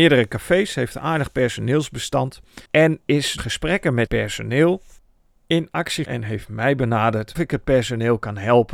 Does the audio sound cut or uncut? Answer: cut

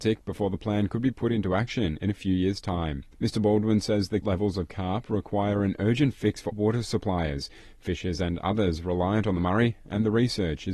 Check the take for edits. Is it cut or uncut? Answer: cut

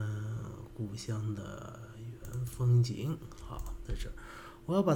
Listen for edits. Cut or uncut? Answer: uncut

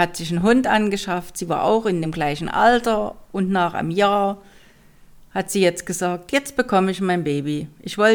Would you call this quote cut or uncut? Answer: uncut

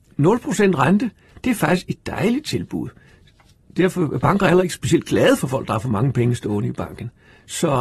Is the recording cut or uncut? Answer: uncut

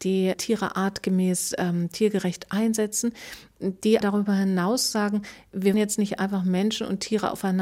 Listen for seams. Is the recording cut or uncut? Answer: cut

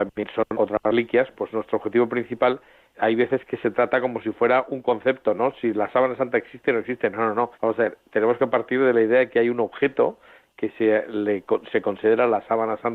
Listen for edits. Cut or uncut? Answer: cut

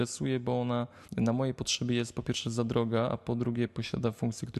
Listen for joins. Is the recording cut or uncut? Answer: cut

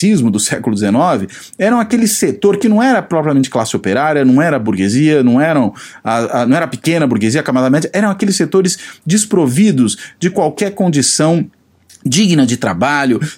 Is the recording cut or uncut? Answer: uncut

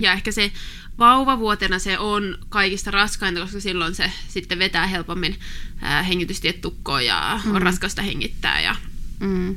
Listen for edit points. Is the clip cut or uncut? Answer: uncut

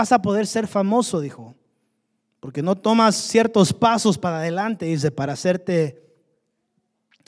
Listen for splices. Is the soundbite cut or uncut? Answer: uncut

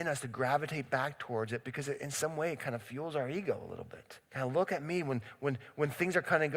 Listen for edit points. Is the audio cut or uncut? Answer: cut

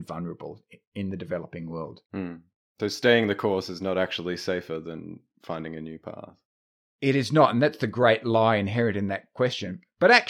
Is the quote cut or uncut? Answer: cut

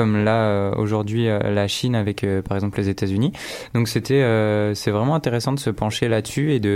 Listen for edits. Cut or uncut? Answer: uncut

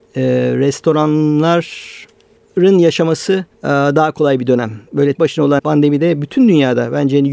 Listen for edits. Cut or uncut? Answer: cut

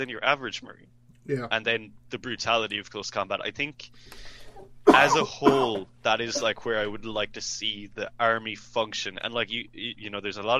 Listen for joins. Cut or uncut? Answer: uncut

